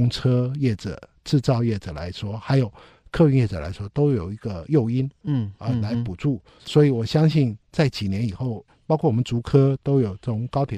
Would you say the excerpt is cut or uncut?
uncut